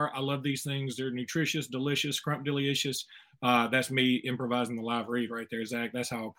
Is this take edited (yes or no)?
no